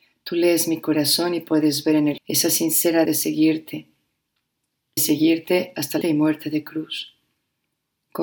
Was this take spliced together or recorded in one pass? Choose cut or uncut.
cut